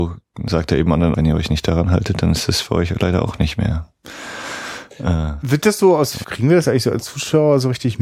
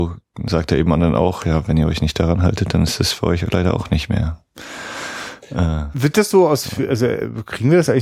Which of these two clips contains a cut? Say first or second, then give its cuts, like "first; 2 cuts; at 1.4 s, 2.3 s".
first; 2 cuts; at 1.1 s, 6.2 s